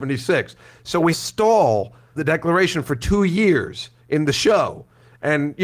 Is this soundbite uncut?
no; 3 cuts; at 1.1 s, 2.2 s, 4.0 s

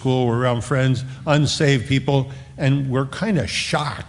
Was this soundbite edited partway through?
no; 0 cuts

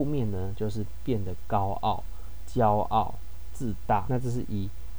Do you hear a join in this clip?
yes; 1 cut; at 4.1 s

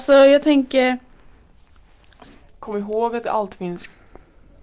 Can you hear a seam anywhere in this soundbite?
yes; 1 cut; at 2.4 s

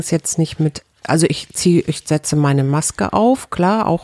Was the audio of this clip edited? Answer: no; 0 cuts

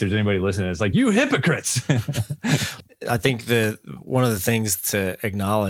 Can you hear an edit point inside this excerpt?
no; 0 cuts

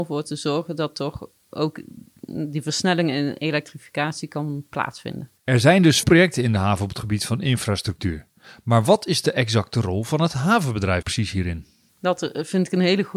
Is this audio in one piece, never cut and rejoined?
no; 2 cuts; at 6.0 s, 11.0 s

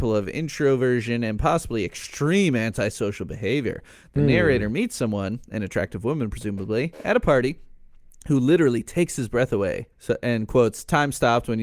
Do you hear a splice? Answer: yes; 1 cut; at 9.9 s

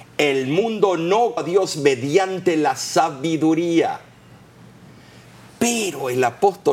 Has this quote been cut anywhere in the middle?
yes; 1 cut; at 1.4 s

